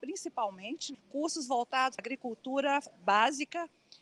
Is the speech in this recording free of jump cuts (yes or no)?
no